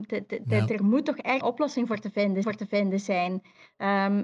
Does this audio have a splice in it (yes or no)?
yes